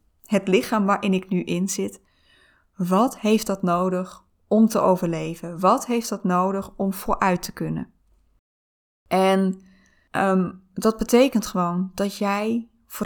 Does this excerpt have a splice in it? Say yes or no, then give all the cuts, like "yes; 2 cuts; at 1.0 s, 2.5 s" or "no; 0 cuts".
no; 0 cuts